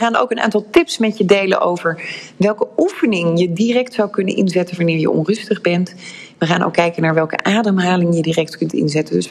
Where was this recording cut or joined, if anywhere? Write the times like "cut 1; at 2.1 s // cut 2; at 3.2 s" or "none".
none